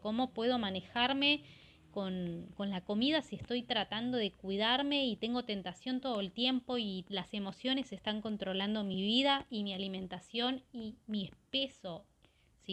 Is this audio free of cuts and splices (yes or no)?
yes